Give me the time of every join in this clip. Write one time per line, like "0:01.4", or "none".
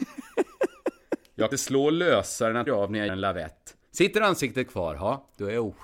0:01.5
0:02.7
0:03.1
0:03.9